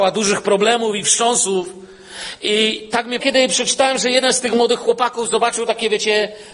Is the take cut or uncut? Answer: cut